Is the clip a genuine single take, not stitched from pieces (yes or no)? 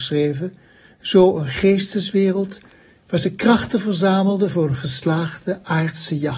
yes